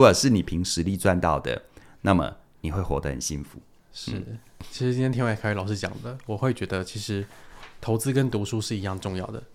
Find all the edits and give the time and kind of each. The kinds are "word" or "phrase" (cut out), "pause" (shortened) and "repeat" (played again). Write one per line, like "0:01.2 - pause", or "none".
none